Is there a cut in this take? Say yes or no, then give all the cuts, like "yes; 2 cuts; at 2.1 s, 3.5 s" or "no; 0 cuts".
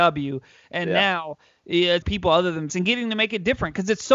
yes; 2 cuts; at 2.0 s, 2.7 s